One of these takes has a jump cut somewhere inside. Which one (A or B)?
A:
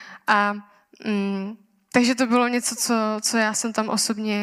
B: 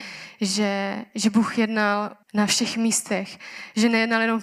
B